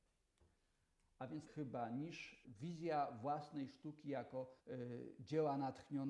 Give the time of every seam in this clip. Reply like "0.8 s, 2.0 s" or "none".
1.5 s, 2.4 s, 4.6 s